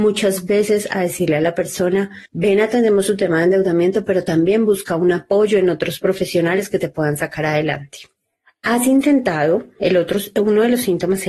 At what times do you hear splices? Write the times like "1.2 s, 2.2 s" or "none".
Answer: 2.3 s, 8.2 s